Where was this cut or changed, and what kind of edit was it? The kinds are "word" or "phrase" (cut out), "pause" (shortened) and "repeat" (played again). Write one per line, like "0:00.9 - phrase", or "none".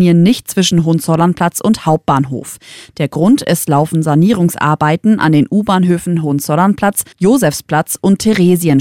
0:07.1 - pause